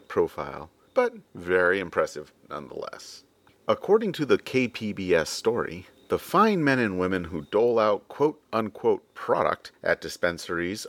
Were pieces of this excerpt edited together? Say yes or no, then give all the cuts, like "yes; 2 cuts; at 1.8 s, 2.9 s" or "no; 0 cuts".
no; 0 cuts